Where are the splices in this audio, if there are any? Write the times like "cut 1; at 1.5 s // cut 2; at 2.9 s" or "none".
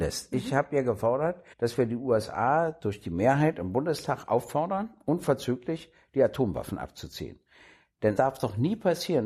cut 1; at 1.5 s // cut 2; at 8.2 s